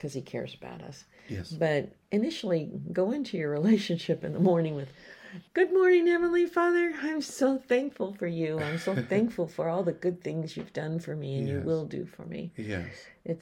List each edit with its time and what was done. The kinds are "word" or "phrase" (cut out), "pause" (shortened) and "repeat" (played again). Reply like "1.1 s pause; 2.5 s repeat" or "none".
2.0 s pause; 5.5 s pause